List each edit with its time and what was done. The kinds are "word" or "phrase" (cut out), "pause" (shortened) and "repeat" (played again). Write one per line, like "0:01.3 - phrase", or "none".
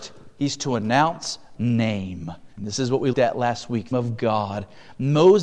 0:01.5 - word
0:02.5 - pause
0:03.1 - word
0:03.9 - phrase

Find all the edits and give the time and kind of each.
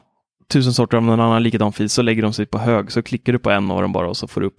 none

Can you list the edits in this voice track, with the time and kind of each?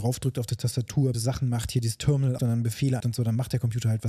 0:01.1 - word
0:02.4 - word
0:03.0 - word

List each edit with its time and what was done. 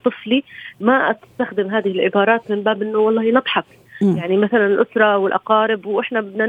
none

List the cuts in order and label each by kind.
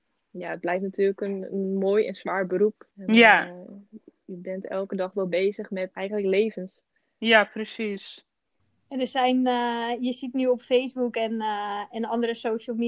0:02.9 - pause
0:05.9 - word
0:07.0 - pause
0:08.6 - pause

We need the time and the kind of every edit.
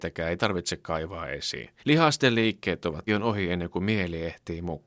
0:01.8 - pause
0:03.1 - phrase

